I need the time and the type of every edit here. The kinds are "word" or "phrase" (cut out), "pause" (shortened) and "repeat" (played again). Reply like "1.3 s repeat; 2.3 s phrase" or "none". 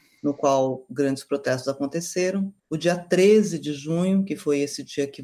2.6 s pause